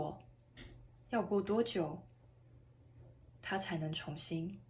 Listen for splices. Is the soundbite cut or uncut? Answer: uncut